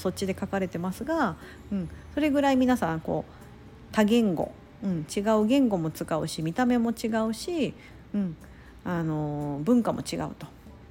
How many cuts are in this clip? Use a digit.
0